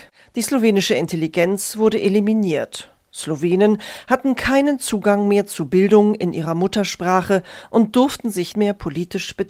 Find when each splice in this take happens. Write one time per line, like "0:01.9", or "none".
0:08.5